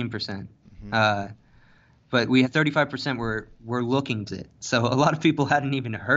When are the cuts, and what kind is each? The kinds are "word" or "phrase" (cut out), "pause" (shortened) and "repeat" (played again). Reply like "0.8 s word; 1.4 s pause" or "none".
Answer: 2.4 s word; 4.3 s word

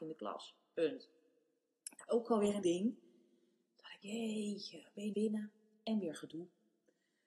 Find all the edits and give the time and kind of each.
2.1 s word; 2.6 s word; 4.0 s word; 5.1 s word

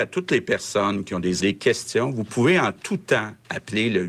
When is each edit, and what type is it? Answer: 1.4 s phrase

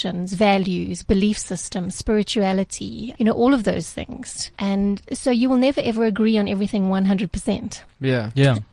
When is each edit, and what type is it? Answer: 3.1 s word; 4.5 s pause

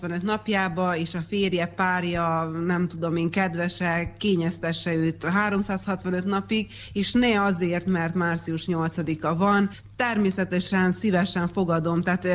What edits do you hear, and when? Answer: none

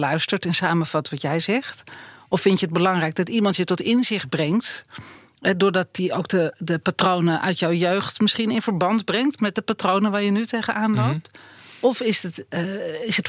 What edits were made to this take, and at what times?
none

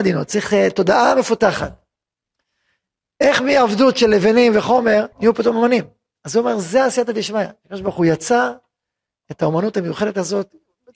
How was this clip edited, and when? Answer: 5.1 s pause

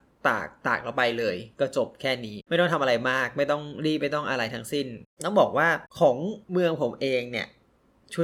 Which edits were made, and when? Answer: 6.4 s pause

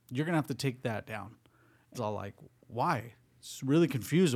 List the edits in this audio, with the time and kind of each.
1.0 s word; 1.9 s word

